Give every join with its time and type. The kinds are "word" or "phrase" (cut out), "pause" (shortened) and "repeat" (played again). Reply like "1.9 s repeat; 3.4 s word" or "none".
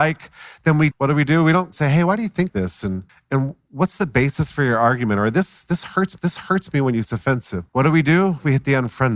0.9 s word; 1.7 s phrase; 2.5 s word; 3.1 s pause; 6.2 s repeat; 7.0 s phrase; 7.7 s pause